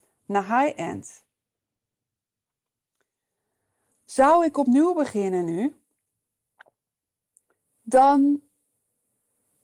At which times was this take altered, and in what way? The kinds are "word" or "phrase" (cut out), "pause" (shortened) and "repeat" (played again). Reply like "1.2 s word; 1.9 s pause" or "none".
none